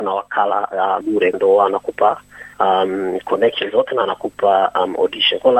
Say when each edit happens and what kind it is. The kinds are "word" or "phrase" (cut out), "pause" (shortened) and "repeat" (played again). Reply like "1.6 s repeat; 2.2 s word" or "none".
1.0 s word; 1.3 s phrase; 2.5 s pause